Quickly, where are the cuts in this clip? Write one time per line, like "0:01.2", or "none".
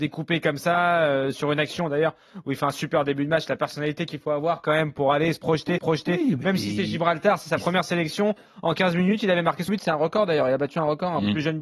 0:05.8
0:09.7